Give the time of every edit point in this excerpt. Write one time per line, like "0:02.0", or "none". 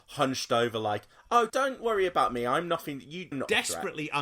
0:01.5
0:03.3

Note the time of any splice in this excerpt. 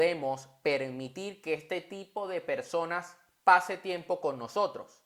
none

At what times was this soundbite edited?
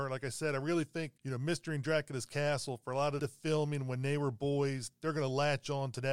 0:01.2
0:03.2

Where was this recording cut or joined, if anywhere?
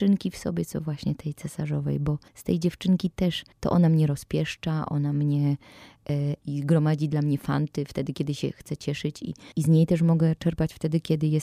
0:02.3
0:03.5
0:09.5

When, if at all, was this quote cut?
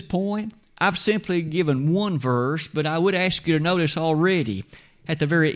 none

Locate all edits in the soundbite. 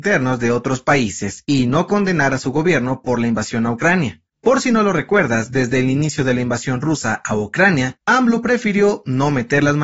none

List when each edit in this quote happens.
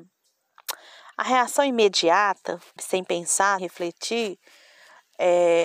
0:02.8
0:03.6

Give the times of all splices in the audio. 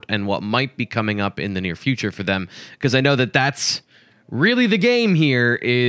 none

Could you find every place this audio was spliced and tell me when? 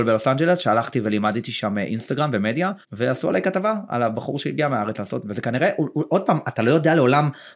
0:02.8

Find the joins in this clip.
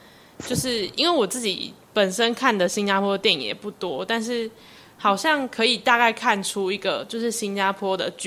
none

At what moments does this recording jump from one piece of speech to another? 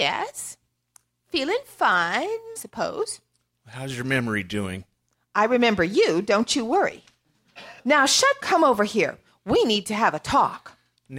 0:02.6
0:07.8
0:08.4

